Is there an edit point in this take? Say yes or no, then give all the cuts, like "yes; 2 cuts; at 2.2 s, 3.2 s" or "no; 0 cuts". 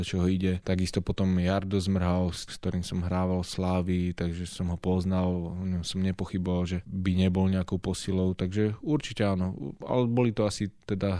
no; 0 cuts